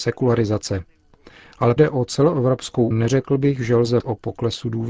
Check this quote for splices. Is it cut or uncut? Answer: cut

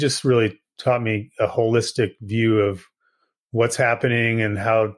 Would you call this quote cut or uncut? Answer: uncut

